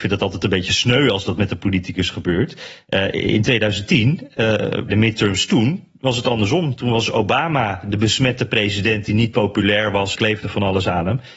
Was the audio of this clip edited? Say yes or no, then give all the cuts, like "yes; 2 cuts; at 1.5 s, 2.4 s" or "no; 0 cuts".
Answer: yes; 2 cuts; at 4.9 s, 10.1 s